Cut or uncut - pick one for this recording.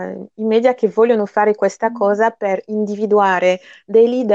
uncut